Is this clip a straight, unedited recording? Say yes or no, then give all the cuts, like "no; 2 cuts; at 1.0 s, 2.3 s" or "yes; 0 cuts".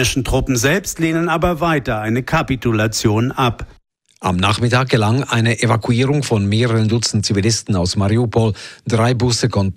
yes; 0 cuts